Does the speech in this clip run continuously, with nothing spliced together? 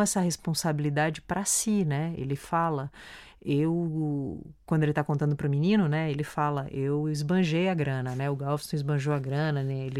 yes; 0 cuts

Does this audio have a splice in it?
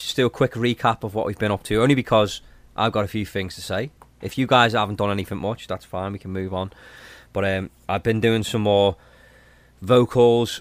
no; 0 cuts

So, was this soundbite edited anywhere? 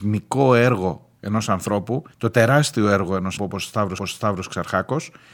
yes; 4 cuts; at 1.2 s, 2.1 s, 3.4 s, 4.0 s

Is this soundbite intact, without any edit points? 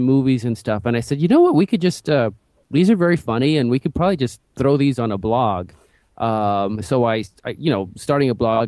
yes; 0 cuts

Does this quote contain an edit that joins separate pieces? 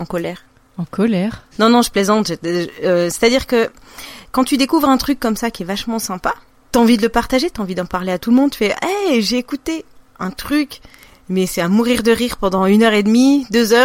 no; 0 cuts

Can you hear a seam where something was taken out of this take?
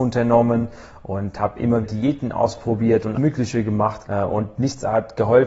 yes; 3 cuts; at 1.8 s, 3.1 s, 4.0 s

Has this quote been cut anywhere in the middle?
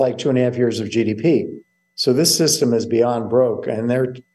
no; 0 cuts

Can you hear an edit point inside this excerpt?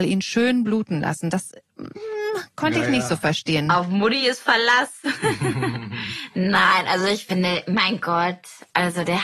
no; 0 cuts

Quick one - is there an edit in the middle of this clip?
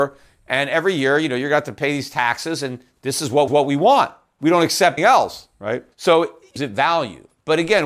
yes; 4 cuts; at 3.5 s, 5.0 s, 5.9 s, 6.6 s

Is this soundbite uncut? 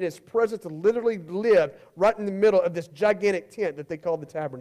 yes; 0 cuts

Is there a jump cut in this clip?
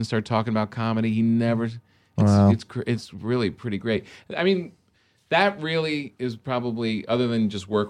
no; 0 cuts

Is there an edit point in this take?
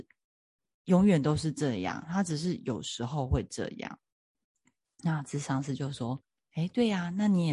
yes; 1 cut; at 6.2 s

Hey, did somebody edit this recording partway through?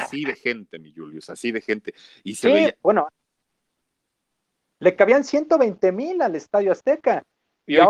no; 0 cuts

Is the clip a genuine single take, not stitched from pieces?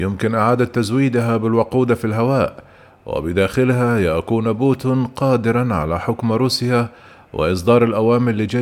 yes; 0 cuts

